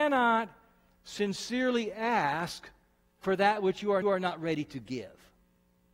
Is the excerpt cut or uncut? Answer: cut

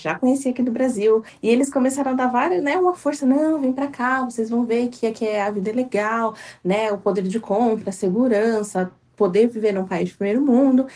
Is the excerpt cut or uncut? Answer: uncut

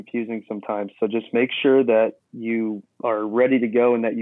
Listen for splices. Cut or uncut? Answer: cut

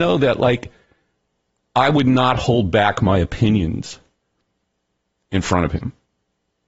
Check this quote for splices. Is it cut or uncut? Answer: uncut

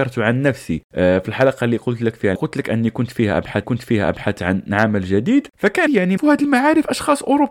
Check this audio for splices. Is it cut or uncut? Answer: cut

